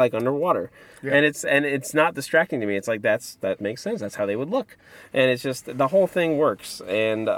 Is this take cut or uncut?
uncut